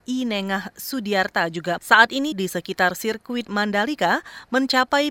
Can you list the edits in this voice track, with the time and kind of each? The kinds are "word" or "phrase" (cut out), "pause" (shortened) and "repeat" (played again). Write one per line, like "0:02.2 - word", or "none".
0:01.8 - word
0:02.3 - phrase